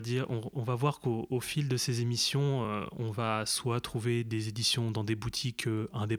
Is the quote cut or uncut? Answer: uncut